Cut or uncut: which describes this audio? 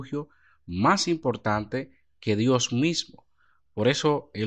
uncut